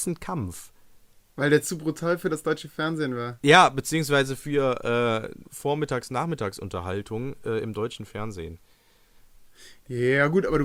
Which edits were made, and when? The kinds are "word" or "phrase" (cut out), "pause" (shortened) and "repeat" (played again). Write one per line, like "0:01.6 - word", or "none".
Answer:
none